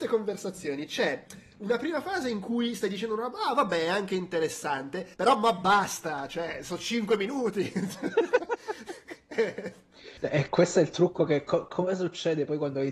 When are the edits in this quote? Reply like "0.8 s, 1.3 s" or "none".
5.1 s, 10.2 s